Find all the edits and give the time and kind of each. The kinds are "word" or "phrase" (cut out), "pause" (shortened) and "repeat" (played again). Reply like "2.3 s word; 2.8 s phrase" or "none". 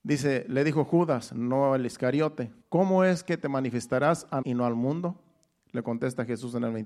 2.6 s word; 4.4 s word